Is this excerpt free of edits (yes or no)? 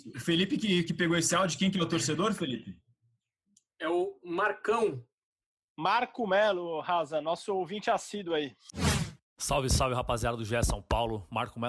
yes